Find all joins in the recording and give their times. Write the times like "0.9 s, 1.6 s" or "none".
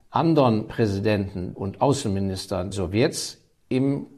1.5 s, 2.7 s

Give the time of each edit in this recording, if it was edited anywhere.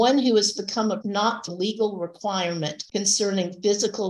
1.0 s, 1.5 s

